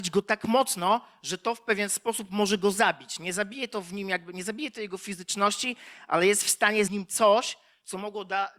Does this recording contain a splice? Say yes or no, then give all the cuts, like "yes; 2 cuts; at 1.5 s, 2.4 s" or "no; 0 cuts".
yes; 1 cut; at 6.9 s